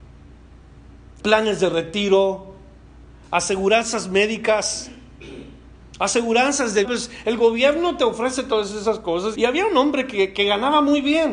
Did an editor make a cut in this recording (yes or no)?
yes